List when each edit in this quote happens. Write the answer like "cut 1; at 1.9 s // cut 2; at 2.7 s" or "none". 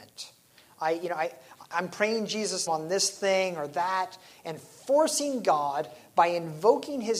cut 1; at 2.7 s